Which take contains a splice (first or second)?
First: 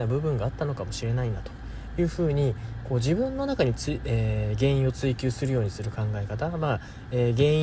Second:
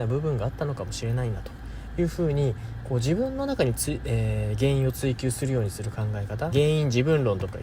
second